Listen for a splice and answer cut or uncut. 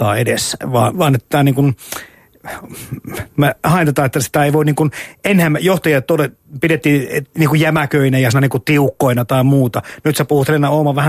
cut